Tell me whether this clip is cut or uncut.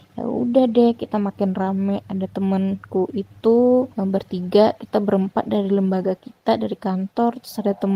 cut